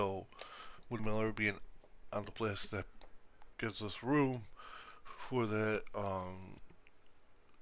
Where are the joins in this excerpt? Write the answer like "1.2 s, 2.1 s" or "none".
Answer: 1.0 s, 2.3 s